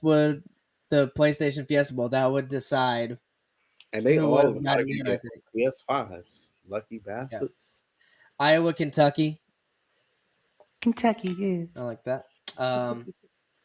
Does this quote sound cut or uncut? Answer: uncut